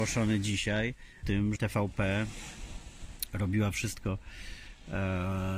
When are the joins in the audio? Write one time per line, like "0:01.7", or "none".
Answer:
0:01.2
0:01.6